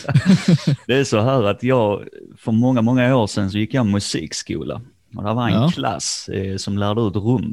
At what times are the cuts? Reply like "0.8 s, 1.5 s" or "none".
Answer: none